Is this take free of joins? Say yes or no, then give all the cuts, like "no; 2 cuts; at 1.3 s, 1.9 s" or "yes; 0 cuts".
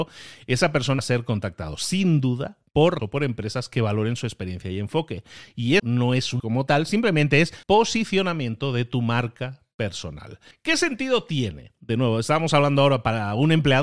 no; 6 cuts; at 1.0 s, 3.0 s, 5.8 s, 6.4 s, 7.6 s, 10.5 s